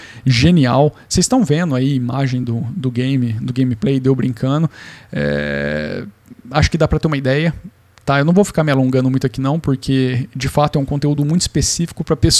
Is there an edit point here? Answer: no; 0 cuts

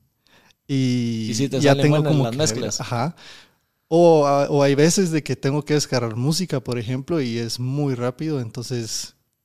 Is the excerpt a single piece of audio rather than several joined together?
yes; 0 cuts

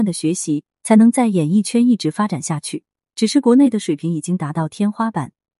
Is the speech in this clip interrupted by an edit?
no; 0 cuts

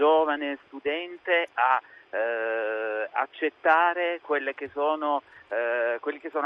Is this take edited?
no; 0 cuts

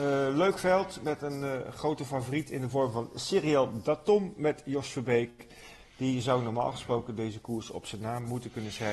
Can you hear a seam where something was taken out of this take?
no; 0 cuts

